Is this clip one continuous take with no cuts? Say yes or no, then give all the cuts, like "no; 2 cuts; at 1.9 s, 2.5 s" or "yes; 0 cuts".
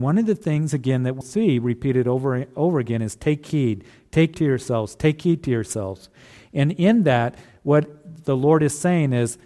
no; 2 cuts; at 1.2 s, 4.3 s